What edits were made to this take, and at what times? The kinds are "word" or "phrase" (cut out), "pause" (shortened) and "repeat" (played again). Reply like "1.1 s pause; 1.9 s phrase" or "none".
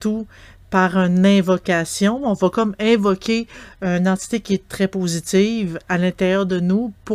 none